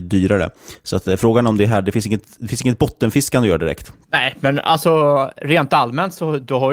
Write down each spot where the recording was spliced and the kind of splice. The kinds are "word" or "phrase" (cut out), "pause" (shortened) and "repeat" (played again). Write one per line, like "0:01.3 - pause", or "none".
none